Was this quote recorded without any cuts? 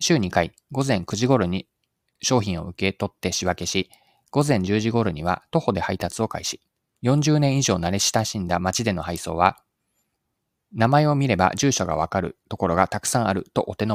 no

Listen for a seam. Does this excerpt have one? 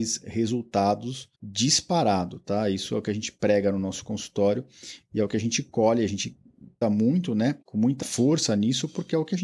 yes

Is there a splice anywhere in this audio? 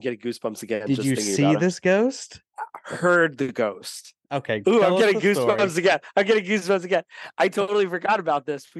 yes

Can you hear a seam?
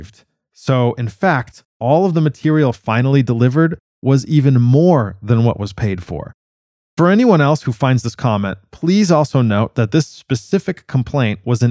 no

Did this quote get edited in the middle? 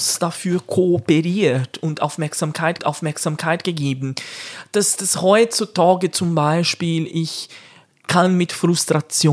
yes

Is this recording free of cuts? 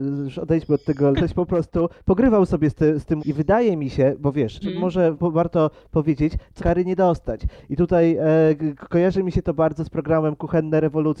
no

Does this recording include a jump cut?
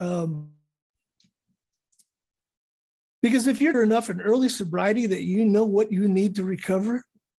yes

